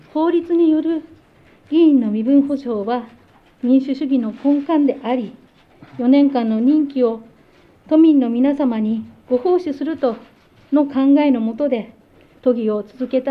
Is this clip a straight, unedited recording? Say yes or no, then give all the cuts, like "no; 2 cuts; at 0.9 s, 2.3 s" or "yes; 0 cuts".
no; 1 cut; at 9.2 s